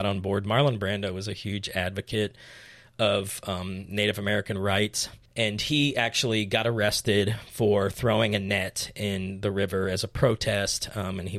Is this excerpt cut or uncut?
uncut